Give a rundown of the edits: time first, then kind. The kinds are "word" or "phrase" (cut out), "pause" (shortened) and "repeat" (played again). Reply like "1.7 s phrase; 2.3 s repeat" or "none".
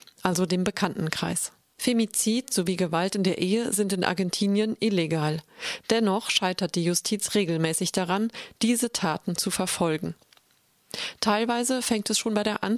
none